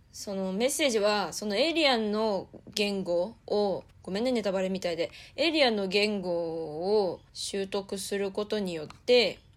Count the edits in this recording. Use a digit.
2